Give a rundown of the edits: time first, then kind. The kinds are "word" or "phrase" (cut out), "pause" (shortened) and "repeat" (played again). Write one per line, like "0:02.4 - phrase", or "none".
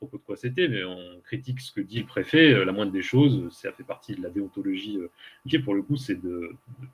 0:05.5 - word